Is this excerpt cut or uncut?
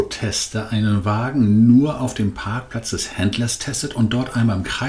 uncut